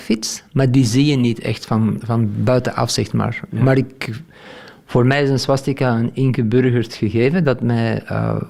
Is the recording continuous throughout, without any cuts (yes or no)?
yes